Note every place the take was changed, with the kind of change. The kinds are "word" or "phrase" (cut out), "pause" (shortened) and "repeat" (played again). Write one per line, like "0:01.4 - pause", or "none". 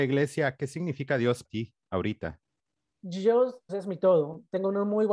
0:01.4 - word
0:03.7 - word